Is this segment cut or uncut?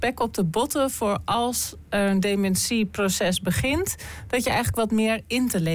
uncut